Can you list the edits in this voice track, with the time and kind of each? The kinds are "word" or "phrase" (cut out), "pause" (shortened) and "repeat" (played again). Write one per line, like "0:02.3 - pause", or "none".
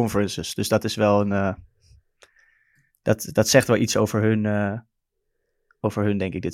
none